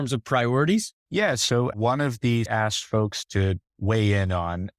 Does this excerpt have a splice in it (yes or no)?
yes